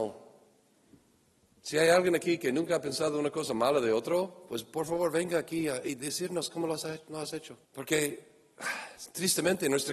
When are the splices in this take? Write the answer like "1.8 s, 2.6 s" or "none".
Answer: 7.6 s